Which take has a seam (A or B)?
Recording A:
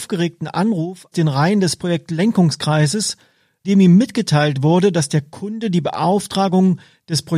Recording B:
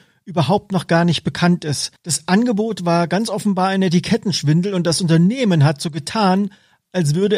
A